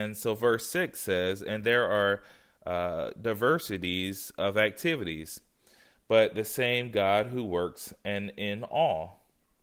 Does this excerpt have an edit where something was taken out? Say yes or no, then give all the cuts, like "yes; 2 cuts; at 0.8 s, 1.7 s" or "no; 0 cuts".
no; 0 cuts